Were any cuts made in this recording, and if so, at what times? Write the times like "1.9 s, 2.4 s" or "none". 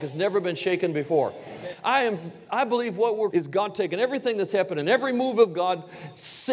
3.3 s